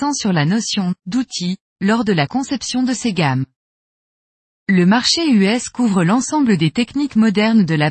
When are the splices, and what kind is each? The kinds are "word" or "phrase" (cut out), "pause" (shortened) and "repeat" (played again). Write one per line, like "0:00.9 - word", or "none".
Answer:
none